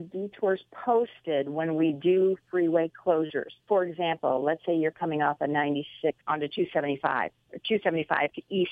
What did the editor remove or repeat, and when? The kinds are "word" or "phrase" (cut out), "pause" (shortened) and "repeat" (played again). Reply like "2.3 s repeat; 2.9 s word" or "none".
3.6 s pause; 6.2 s pause